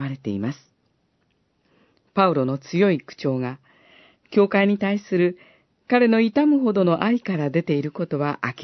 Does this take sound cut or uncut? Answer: uncut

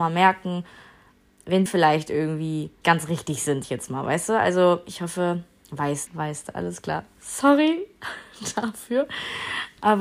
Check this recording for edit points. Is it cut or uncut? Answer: cut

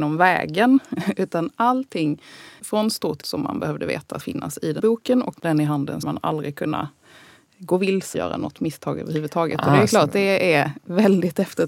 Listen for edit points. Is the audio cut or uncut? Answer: cut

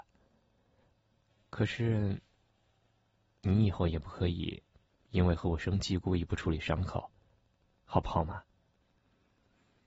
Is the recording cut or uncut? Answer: uncut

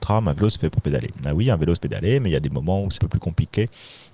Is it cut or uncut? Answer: cut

